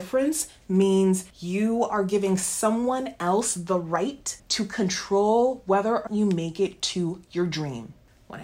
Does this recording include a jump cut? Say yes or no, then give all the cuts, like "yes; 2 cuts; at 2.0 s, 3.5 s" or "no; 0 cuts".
yes; 3 cuts; at 1.3 s, 4.4 s, 6.1 s